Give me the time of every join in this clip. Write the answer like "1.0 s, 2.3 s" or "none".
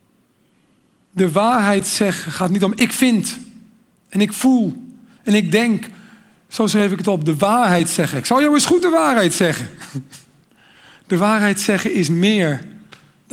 10.4 s